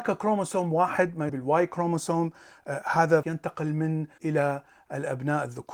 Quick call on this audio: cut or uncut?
cut